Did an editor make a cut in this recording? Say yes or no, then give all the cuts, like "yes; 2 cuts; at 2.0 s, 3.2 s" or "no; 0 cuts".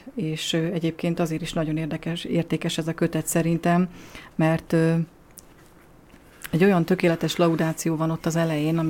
no; 0 cuts